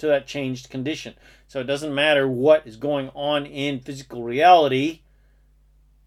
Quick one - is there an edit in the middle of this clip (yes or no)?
no